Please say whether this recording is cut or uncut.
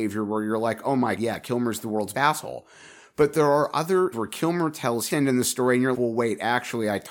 cut